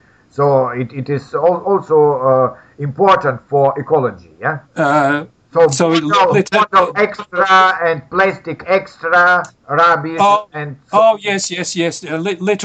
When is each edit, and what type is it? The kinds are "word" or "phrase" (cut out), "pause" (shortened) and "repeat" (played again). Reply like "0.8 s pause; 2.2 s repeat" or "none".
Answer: 4.7 s pause; 9.6 s pause